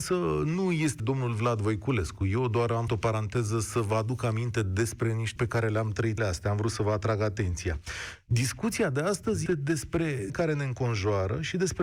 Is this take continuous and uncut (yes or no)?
no